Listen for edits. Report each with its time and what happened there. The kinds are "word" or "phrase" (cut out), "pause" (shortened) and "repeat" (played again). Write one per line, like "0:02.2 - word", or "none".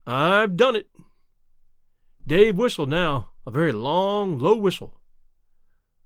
none

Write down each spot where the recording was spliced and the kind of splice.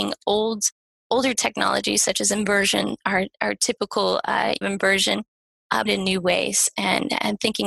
0:04.6 - phrase
0:05.9 - phrase

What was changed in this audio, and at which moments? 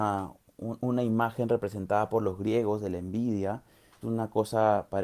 0:04.0 - word

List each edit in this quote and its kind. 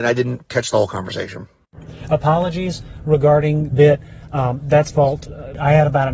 0:03.7 - phrase
0:04.9 - word

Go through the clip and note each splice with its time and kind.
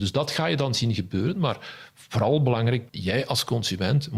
0:02.9 - word

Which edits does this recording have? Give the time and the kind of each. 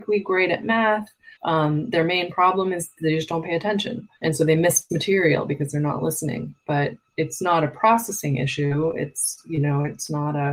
0:01.4 - pause
0:04.2 - pause

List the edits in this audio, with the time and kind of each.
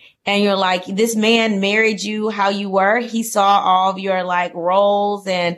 none

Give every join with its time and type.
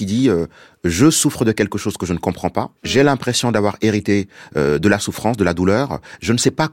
0:02.8 - pause

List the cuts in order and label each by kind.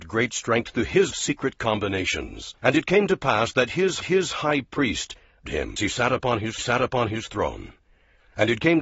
0:01.1 - phrase
0:02.6 - pause
0:04.0 - repeat
0:05.5 - word
0:05.8 - word
0:06.6 - repeat

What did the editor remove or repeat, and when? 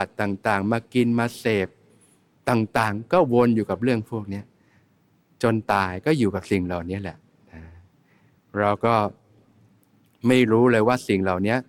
none

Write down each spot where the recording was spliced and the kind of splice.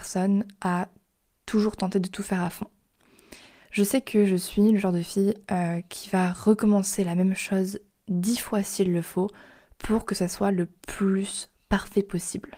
none

